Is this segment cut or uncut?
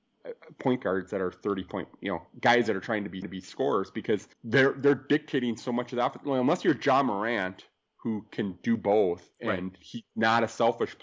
cut